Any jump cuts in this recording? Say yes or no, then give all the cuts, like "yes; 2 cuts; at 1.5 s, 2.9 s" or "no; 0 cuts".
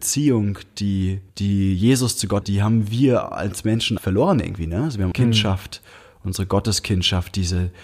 yes; 4 cuts; at 1.3 s, 2.4 s, 4.0 s, 5.1 s